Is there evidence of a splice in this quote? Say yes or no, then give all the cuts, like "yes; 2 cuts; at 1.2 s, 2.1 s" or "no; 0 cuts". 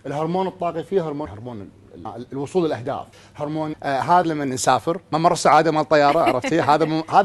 yes; 5 cuts; at 1.3 s, 2.1 s, 3.1 s, 3.7 s, 4.2 s